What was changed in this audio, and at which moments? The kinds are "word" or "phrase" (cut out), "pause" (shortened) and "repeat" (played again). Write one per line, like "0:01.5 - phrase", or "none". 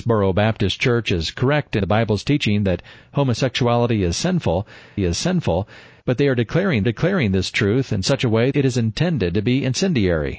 0:01.8 - word
0:05.0 - repeat
0:06.8 - repeat
0:08.5 - word